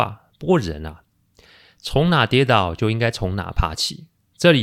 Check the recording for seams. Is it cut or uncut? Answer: uncut